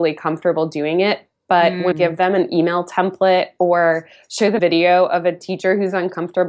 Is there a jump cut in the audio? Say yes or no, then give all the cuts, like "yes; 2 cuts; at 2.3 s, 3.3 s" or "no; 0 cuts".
yes; 2 cuts; at 1.9 s, 4.6 s